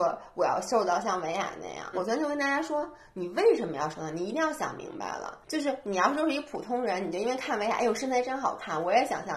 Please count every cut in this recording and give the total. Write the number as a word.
two